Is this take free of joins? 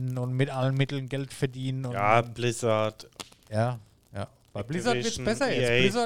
yes; 0 cuts

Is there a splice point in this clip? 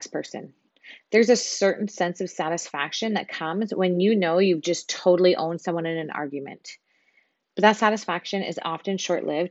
no; 0 cuts

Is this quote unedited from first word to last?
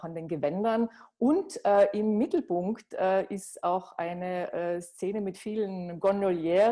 yes; 0 cuts

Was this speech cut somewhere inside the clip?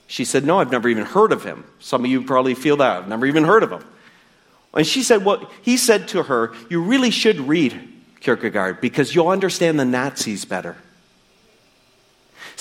no; 0 cuts

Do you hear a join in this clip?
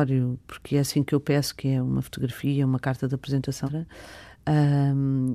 yes; 1 cut; at 3.7 s

